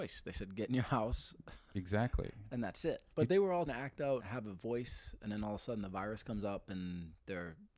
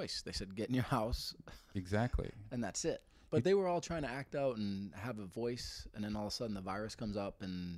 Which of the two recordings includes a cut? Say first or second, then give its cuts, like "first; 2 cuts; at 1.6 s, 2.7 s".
first; 3 cuts; at 3.1 s, 3.7 s, 4.2 s